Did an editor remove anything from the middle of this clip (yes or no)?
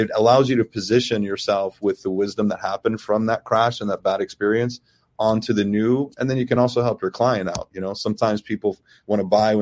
no